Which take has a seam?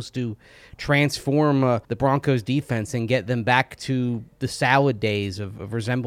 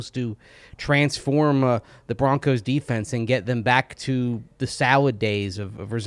first; 1 cut; at 1.8 s

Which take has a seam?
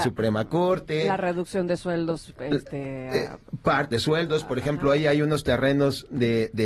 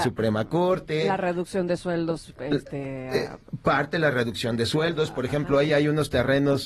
first; 1 cut; at 3.9 s

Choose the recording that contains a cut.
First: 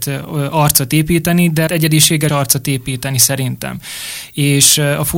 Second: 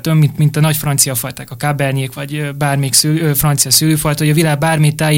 first; 2 cuts; at 1.7 s, 2.3 s

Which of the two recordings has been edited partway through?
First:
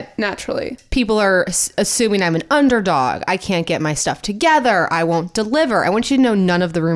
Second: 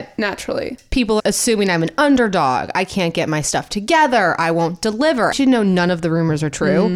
second; 2 cuts; at 1.2 s, 5.3 s

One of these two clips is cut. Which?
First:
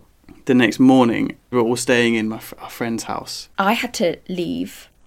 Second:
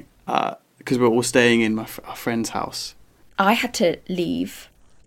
first; 2 cuts; at 1.5 s, 3.5 s

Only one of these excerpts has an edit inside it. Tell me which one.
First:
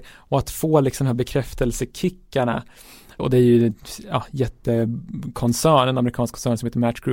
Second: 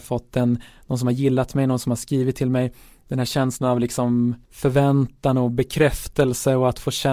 second; 1 cut; at 4.4 s

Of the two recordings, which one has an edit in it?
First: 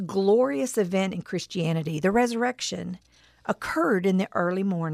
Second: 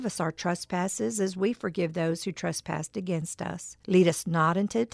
second; 1 cut; at 3.8 s

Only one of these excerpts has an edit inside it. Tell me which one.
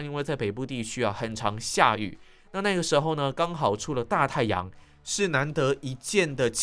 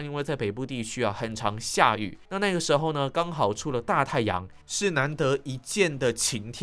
second; 2 cuts; at 2.2 s, 4.6 s

